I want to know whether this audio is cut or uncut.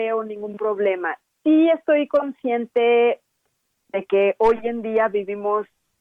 uncut